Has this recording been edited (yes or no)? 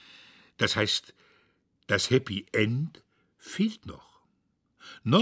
no